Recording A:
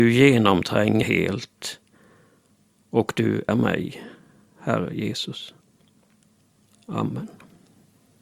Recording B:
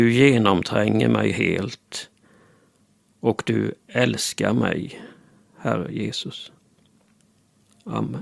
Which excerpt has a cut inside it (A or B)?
A